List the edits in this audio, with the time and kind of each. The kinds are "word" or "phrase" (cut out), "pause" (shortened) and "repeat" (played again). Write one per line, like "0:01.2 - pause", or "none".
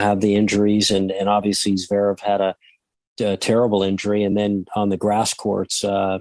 none

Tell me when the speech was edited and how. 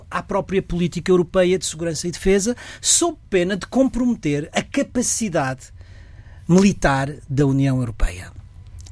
none

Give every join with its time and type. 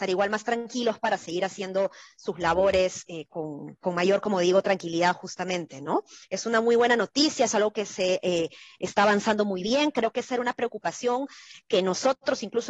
none

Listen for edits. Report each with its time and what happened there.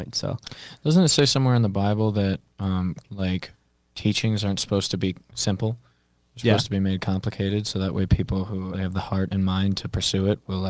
0:03.0 - word
0:08.7 - word

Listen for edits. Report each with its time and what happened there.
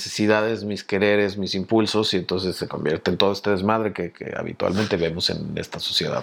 none

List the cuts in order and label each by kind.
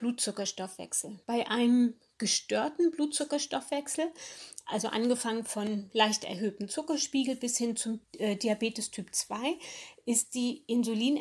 0:01.2 - pause
0:08.0 - pause

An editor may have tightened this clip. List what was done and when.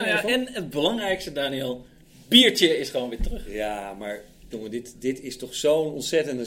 0:04.5 - word

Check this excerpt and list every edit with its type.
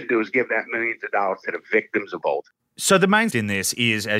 0:02.2 - word
0:03.3 - word

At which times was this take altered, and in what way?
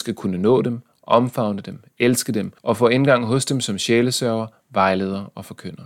0:02.6 - pause

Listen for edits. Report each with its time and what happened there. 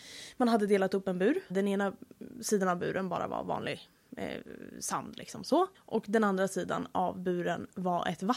0:01.5 - word
0:04.0 - pause
0:05.7 - pause

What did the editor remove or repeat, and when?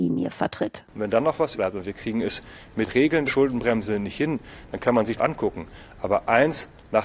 0:01.6 - word
0:02.9 - word
0:03.3 - word
0:05.2 - word

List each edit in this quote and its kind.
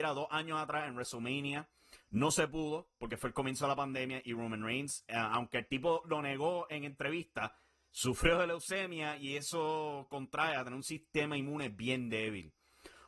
none

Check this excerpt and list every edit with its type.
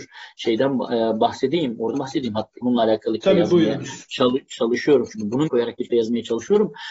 0:01.9 - phrase
0:02.6 - word
0:03.2 - word
0:05.5 - word
0:05.9 - word

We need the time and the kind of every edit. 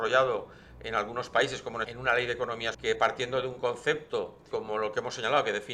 0:01.8 - word
0:02.7 - word
0:04.5 - word

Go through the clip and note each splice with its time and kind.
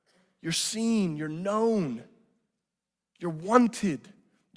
none

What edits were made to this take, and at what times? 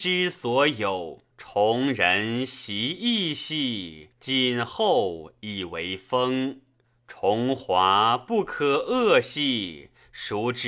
0:01.3 - pause
0:04.1 - pause
0:06.8 - pause

